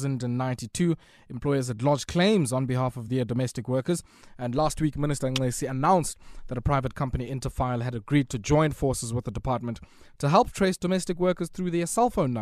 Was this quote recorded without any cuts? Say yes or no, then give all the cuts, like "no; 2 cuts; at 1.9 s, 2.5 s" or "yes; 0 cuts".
yes; 0 cuts